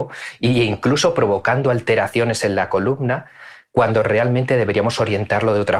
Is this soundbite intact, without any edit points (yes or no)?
yes